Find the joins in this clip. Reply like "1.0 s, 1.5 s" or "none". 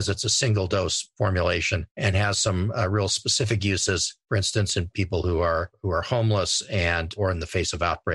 1.9 s